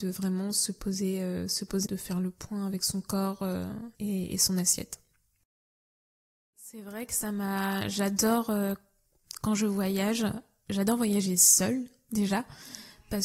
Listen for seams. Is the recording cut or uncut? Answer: cut